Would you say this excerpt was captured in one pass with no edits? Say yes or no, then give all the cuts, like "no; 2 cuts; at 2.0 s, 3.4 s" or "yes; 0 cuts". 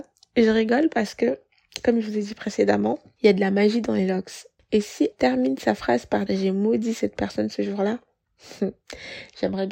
no; 2 cuts; at 5.1 s, 6.3 s